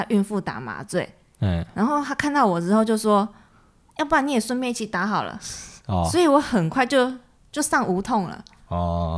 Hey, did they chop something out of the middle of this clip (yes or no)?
no